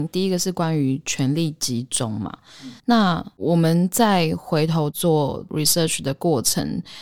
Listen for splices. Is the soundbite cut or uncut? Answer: cut